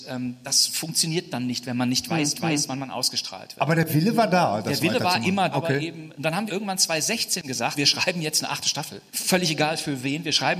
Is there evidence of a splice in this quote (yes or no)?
yes